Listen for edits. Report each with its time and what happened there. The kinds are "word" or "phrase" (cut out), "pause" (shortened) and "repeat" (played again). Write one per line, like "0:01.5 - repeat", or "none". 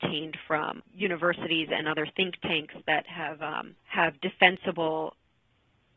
0:03.8 - pause